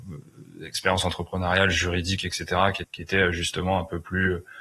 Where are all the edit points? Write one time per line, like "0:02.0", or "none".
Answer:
0:02.8